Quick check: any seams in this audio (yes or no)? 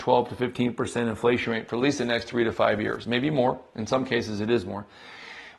no